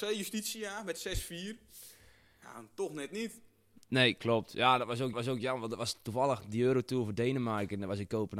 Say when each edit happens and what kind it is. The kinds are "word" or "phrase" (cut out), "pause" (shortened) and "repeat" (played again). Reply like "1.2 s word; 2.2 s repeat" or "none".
5.1 s repeat